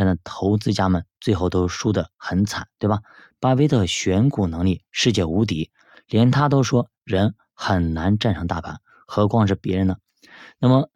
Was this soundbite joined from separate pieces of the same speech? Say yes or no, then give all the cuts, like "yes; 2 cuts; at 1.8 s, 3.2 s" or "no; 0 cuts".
no; 0 cuts